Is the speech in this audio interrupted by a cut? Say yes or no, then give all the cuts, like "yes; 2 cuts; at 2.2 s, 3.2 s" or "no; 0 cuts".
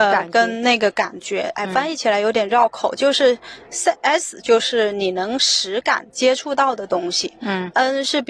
no; 0 cuts